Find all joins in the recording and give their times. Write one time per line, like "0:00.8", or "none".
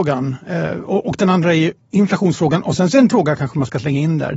0:03.1